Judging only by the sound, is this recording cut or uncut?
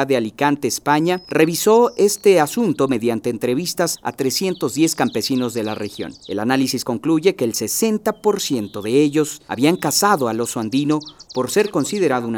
uncut